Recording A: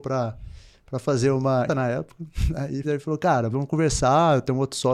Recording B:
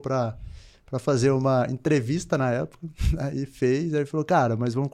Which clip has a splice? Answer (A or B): A